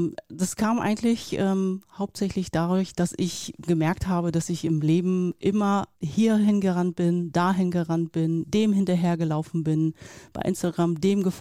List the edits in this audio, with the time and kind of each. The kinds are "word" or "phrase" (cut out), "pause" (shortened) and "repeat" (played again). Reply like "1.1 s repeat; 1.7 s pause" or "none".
5.9 s pause